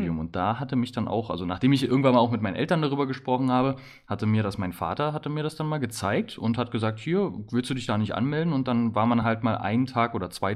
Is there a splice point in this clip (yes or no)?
no